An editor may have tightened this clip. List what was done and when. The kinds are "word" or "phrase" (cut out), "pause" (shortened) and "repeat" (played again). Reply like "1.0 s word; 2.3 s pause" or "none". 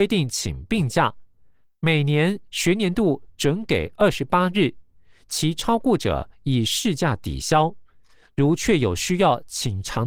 none

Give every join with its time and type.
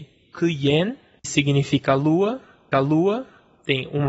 1.2 s word; 2.7 s repeat

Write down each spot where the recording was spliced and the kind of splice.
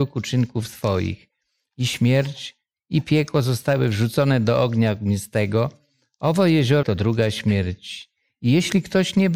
6.8 s word

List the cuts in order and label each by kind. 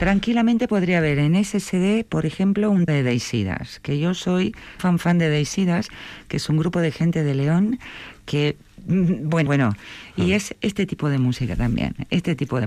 2.9 s word; 4.8 s word; 9.5 s word

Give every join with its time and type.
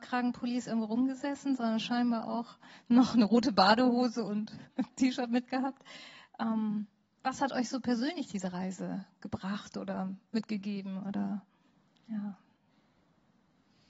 none

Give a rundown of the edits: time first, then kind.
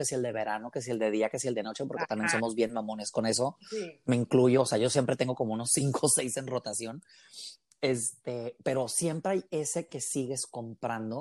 none

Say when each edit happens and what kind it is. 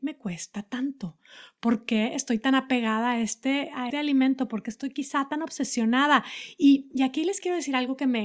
3.9 s word

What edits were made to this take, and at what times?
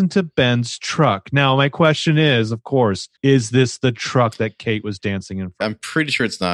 3.2 s pause; 5.6 s word

